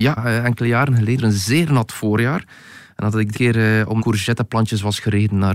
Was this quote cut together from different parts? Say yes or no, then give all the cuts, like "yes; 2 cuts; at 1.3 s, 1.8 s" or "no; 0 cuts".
yes; 3 cuts; at 1.2 s, 3.3 s, 4.0 s